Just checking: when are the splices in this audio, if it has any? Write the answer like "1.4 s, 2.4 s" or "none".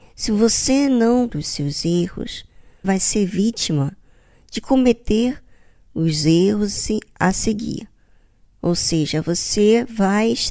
1.3 s, 2.8 s